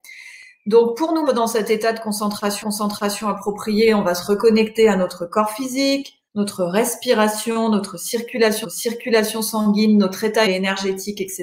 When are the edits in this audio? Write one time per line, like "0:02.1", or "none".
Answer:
0:01.3
0:02.6
0:06.3
0:08.6
0:10.5